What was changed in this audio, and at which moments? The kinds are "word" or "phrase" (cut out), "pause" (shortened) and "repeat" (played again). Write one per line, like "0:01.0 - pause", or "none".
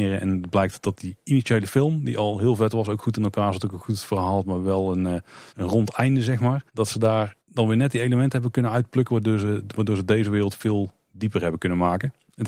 0:05.5 - pause
0:06.7 - pause
0:07.4 - pause